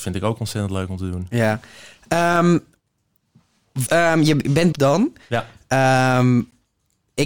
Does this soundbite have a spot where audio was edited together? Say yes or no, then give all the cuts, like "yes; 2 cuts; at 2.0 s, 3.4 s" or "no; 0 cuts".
yes; 2 cuts; at 3.9 s, 4.7 s